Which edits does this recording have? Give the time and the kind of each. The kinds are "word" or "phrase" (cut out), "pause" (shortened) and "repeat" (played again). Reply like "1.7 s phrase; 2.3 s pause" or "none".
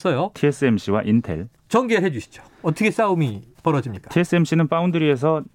1.6 s pause

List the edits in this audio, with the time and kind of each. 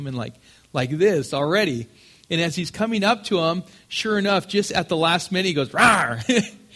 none

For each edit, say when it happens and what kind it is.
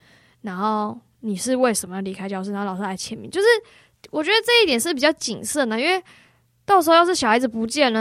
none

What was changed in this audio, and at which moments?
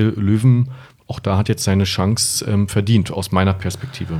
none

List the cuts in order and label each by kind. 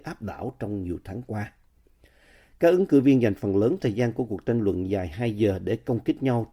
none

